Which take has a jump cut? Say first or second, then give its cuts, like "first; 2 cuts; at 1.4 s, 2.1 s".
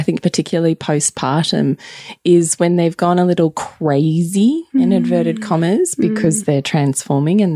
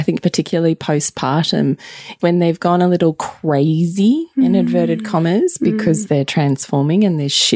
second; 1 cut; at 2.2 s